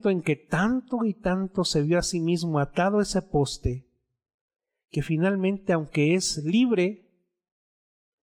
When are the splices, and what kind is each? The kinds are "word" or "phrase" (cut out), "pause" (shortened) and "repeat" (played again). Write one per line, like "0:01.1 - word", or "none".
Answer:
none